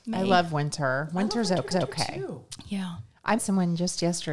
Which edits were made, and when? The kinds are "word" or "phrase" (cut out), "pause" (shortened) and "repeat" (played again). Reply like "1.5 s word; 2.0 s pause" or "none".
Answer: 1.7 s repeat; 3.4 s word